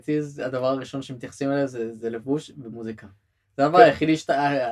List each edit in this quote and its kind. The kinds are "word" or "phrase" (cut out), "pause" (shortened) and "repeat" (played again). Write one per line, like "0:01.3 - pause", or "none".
none